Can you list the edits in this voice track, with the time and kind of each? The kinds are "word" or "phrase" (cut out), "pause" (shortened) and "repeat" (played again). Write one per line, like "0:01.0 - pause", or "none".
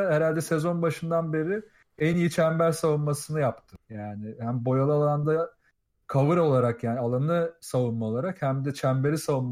none